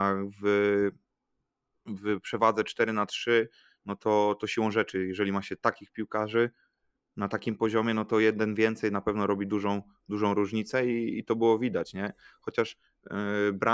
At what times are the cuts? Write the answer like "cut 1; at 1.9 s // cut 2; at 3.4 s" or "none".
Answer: none